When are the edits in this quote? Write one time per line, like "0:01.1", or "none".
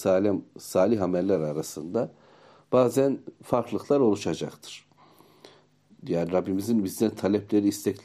none